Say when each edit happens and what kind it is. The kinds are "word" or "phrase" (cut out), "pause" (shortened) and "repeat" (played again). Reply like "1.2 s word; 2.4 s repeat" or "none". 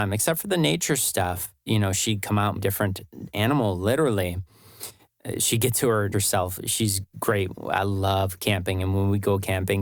2.6 s word; 6.1 s word